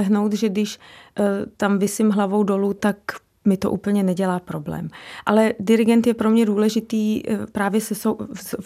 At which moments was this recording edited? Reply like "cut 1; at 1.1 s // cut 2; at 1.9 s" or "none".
none